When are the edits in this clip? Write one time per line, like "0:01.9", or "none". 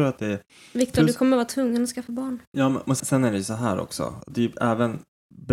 0:03.0